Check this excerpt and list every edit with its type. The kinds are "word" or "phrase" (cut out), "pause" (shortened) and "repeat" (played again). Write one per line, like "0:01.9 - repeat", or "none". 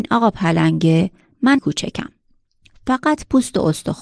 0:01.6 - word